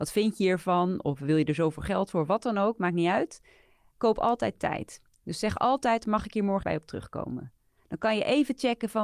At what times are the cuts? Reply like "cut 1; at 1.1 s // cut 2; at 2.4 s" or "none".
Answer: cut 1; at 6.6 s